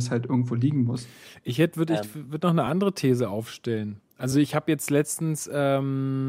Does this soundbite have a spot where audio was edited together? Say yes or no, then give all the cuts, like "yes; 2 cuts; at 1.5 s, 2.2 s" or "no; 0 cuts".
no; 0 cuts